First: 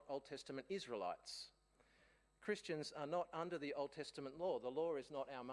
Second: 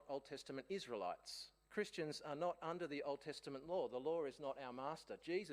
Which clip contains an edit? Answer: second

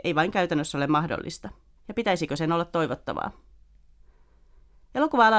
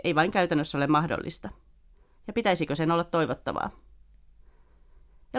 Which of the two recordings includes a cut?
first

